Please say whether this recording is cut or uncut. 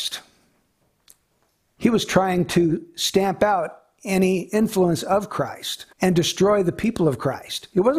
cut